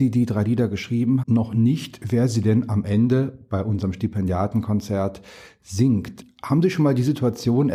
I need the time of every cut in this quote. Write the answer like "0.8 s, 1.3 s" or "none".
1.2 s

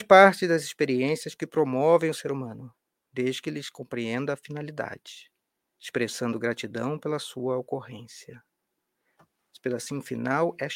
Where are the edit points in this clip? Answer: none

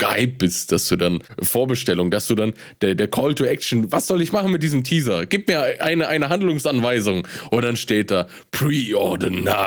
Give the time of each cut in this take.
none

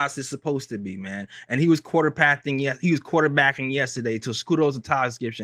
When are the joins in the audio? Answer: none

